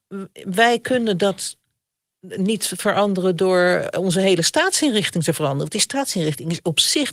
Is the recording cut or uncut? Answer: uncut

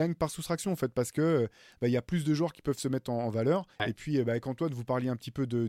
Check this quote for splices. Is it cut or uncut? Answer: cut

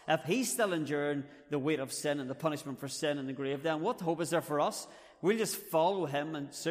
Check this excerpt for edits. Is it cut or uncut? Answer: uncut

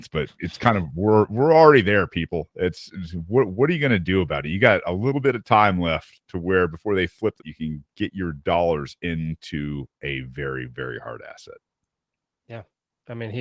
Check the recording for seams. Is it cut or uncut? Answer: cut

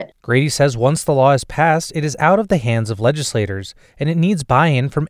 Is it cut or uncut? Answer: uncut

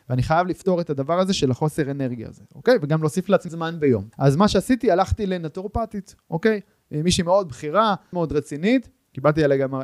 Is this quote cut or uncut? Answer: cut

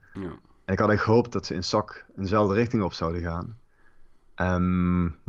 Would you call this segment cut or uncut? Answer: uncut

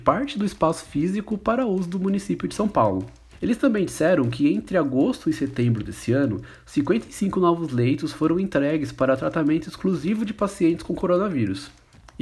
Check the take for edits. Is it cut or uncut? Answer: uncut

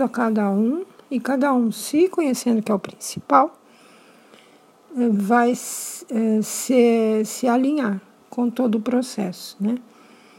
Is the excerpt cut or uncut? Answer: uncut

